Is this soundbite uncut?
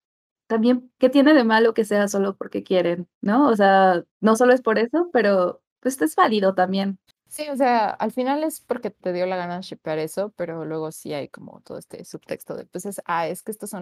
no; 6 cuts; at 0.9 s, 3.1 s, 4.1 s, 5.7 s, 7.1 s, 9.0 s

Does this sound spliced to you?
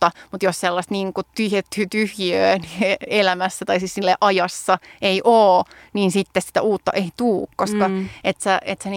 no; 0 cuts

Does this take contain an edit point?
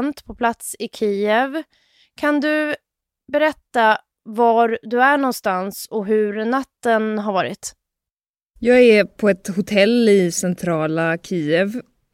no; 0 cuts

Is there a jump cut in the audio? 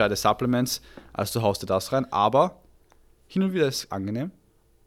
no; 0 cuts

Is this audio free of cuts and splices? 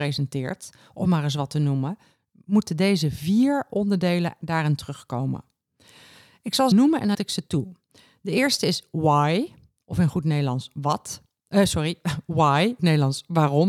no; 3 cuts; at 6.7 s, 7.1 s, 12.8 s

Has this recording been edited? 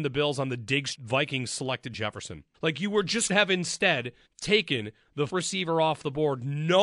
yes; 6 cuts; at 0.9 s, 1.9 s, 2.5 s, 3.3 s, 4.3 s, 5.3 s

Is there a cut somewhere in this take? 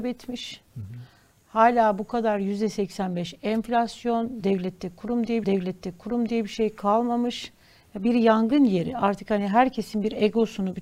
yes; 1 cut; at 5.4 s

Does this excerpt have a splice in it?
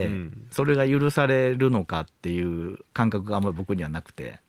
yes; 1 cut; at 2.8 s

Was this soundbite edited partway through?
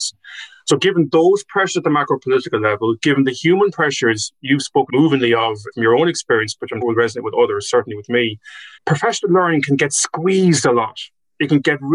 yes; 4 cuts; at 4.9 s, 5.7 s, 6.8 s, 8.8 s

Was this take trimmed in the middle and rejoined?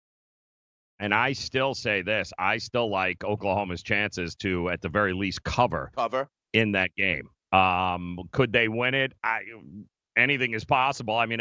no; 0 cuts

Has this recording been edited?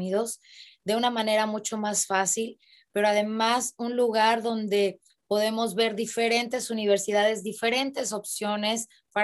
no; 0 cuts

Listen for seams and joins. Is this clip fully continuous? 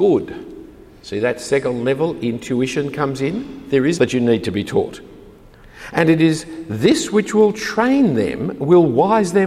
no; 1 cut; at 3.9 s

